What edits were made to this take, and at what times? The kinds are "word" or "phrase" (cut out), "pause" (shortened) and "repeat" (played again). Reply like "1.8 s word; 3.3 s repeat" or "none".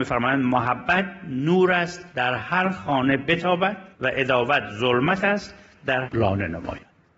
2.1 s pause; 3.9 s pause; 6.0 s phrase